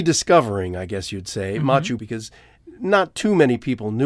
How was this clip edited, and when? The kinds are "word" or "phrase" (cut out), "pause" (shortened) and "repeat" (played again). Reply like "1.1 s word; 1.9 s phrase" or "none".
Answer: 2.0 s word

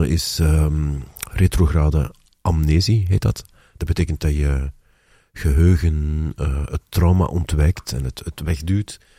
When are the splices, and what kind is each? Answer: none

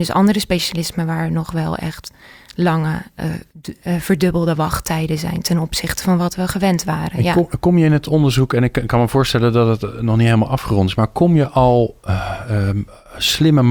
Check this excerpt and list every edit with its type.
3.5 s pause

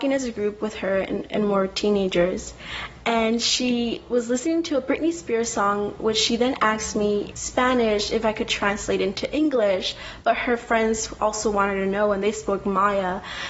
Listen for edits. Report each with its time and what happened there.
7.3 s word

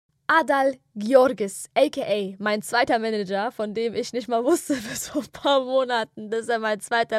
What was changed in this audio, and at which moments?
none

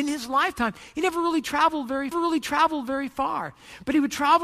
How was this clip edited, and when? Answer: 2.1 s repeat

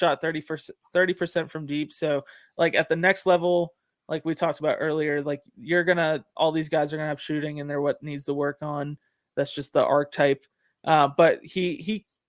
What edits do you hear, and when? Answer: none

